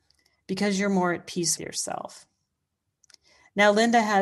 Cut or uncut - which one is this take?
cut